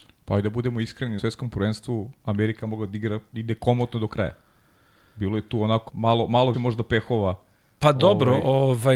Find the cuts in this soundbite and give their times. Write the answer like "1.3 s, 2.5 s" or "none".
1.2 s, 5.9 s, 6.5 s